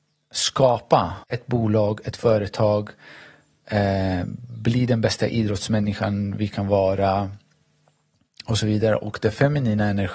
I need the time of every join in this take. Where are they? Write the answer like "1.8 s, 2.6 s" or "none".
1.2 s